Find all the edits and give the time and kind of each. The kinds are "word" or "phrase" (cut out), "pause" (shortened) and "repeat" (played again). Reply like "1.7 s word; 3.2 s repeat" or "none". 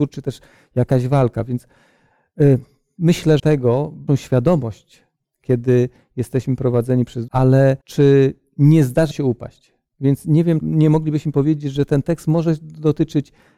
3.4 s phrase; 4.1 s phrase; 7.3 s phrase; 7.8 s pause; 9.1 s word; 10.6 s word